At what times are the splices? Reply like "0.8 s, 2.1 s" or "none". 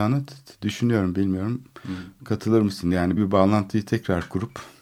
3.2 s